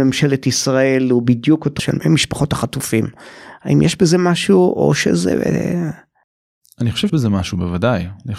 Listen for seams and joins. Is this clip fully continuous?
no; 2 cuts; at 1.8 s, 7.1 s

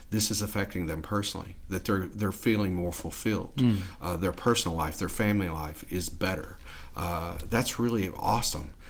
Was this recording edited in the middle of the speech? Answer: no; 0 cuts

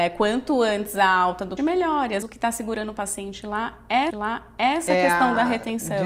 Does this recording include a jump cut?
yes; 3 cuts; at 1.6 s, 2.2 s, 4.1 s

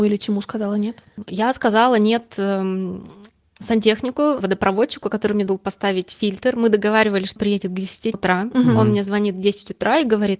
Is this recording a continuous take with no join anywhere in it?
no; 4 cuts; at 4.4 s, 5.5 s, 7.4 s, 8.1 s

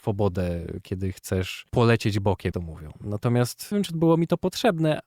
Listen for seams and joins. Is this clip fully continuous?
no; 3 cuts; at 1.7 s, 2.5 s, 3.7 s

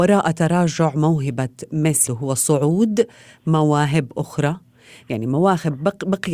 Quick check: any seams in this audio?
yes; 1 cut; at 2.1 s

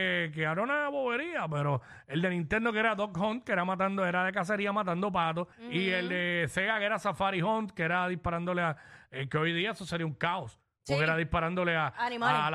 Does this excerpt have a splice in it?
yes; 1 cut; at 5.5 s

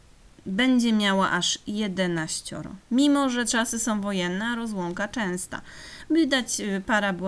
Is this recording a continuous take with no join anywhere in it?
no; 1 cut; at 2.8 s

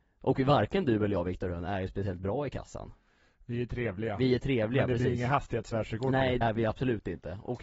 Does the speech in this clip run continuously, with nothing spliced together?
no; 1 cut; at 6.4 s

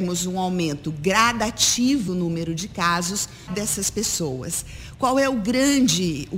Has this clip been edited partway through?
yes; 2 cuts; at 2.1 s, 3.5 s

